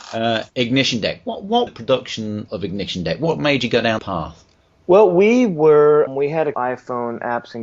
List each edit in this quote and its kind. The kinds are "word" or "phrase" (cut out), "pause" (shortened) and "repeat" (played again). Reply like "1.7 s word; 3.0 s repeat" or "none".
1.7 s phrase; 2.5 s word; 4.0 s word; 4.5 s pause; 6.1 s word; 6.5 s word